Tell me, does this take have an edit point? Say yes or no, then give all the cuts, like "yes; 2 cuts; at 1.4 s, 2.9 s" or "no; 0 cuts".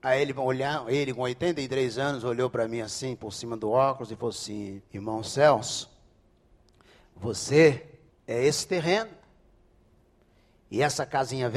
yes; 2 cuts; at 4.9 s, 8.1 s